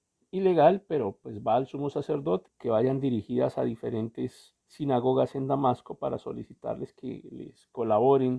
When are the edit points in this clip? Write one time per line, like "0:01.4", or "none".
0:02.5
0:04.6